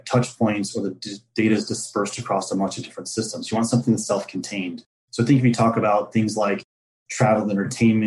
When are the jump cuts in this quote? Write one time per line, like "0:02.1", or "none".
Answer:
none